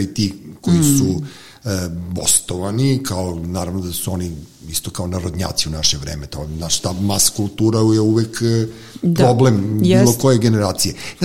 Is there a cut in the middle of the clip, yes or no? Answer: no